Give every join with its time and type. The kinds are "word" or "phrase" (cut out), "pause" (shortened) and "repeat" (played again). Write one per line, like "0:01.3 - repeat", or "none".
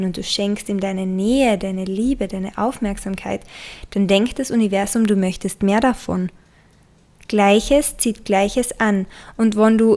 none